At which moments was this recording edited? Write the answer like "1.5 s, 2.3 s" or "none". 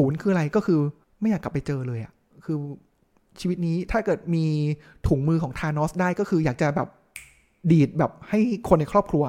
1.0 s